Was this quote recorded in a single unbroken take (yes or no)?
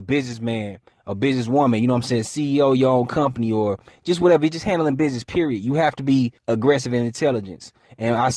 no